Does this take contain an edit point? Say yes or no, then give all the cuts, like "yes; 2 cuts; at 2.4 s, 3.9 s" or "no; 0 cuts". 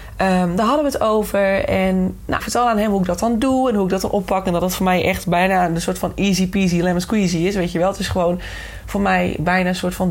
yes; 1 cut; at 2.4 s